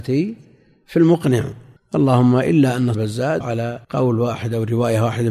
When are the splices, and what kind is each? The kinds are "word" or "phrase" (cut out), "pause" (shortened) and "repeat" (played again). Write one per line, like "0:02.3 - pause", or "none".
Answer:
0:01.8 - pause
0:02.9 - word
0:03.4 - word
0:03.8 - pause